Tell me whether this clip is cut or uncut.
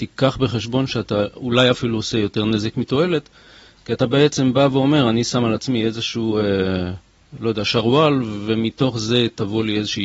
uncut